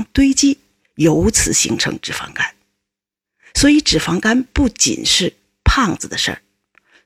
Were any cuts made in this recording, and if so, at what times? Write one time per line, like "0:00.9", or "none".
none